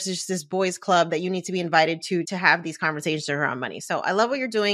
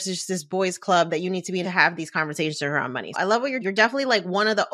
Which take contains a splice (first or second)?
second